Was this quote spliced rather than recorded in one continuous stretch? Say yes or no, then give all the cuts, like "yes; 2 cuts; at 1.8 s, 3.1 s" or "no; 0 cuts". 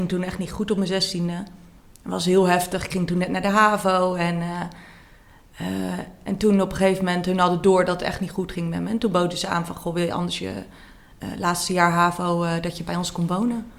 no; 0 cuts